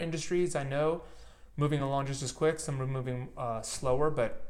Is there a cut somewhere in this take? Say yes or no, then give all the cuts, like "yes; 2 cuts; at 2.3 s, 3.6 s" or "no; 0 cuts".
no; 0 cuts